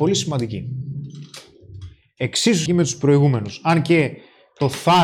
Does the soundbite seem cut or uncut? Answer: cut